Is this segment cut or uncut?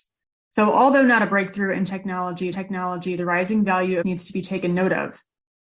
cut